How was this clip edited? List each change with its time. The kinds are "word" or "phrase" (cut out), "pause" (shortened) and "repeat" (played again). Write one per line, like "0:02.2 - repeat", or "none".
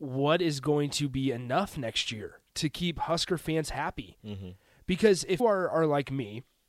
0:05.4 - word